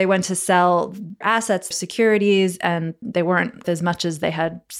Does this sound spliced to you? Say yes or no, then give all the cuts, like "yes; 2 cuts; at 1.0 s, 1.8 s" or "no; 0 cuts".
yes; 4 cuts; at 1.2 s, 1.7 s, 3.0 s, 3.6 s